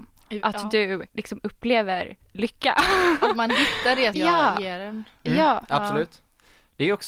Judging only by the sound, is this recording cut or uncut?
cut